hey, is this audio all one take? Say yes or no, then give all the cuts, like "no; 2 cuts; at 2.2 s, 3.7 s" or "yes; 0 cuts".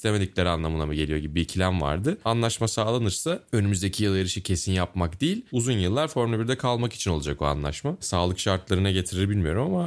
yes; 0 cuts